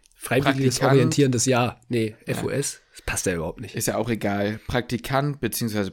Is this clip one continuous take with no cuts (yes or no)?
yes